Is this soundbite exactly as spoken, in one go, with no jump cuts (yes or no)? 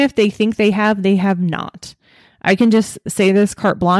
yes